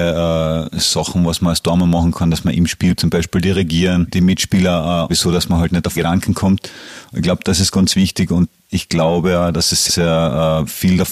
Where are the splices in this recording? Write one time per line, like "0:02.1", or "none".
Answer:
0:03.0
0:05.1
0:05.9
0:09.9